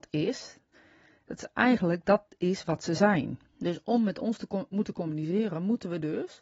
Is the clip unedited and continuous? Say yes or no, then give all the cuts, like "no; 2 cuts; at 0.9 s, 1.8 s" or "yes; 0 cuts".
no; 2 cuts; at 2.3 s, 3.5 s